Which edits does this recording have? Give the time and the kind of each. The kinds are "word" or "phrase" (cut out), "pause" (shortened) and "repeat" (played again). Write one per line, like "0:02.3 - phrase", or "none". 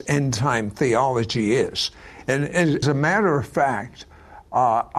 0:02.8 - word